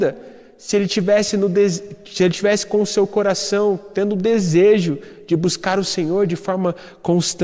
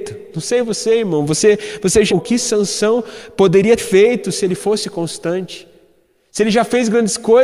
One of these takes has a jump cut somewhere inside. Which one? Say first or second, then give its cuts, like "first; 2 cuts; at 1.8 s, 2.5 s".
second; 2 cuts; at 2.1 s, 3.8 s